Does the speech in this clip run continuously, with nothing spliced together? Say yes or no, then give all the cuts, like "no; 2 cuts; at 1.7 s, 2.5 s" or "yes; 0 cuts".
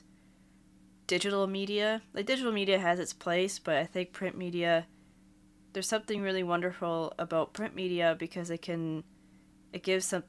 yes; 0 cuts